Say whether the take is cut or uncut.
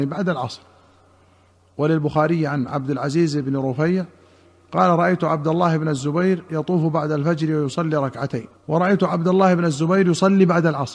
cut